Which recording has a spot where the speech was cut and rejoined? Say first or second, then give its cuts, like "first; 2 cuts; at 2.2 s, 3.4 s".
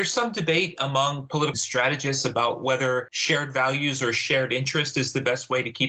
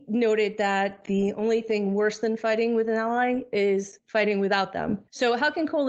first; 1 cut; at 1.5 s